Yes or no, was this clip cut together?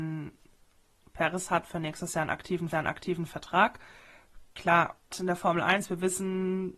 yes